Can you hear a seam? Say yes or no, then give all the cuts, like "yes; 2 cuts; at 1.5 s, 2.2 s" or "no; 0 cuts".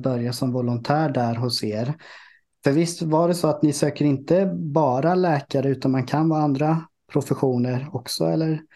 no; 0 cuts